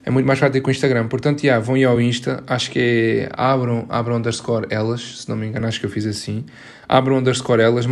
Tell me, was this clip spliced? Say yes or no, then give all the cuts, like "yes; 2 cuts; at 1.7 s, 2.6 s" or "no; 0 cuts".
no; 0 cuts